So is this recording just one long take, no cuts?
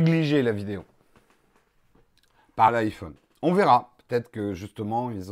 no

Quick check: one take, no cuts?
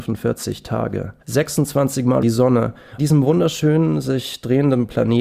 no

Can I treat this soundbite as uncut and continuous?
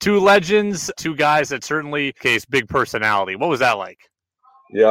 no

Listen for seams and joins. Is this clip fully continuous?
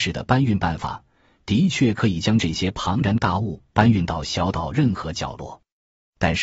yes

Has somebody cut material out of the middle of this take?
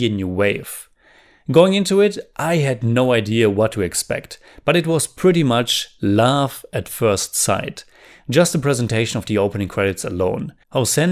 no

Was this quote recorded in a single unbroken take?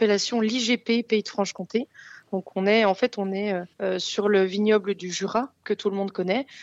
no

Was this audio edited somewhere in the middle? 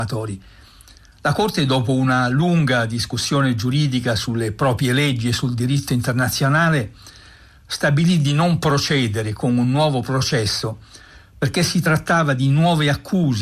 no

